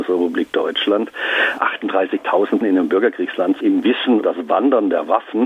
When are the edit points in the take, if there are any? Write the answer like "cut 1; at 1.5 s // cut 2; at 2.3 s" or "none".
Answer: cut 1; at 2.6 s // cut 2; at 3.6 s // cut 3; at 4.2 s